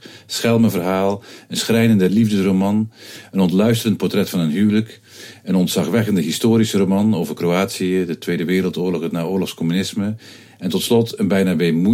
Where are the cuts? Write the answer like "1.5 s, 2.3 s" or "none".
none